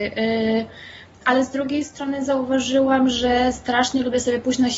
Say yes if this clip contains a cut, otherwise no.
no